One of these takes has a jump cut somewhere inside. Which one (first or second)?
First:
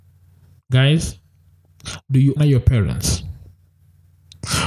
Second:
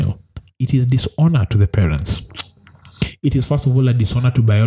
first